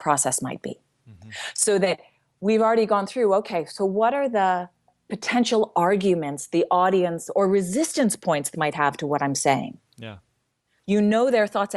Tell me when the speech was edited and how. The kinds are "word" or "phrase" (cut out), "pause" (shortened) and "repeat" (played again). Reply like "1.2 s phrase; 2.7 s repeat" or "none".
8.5 s word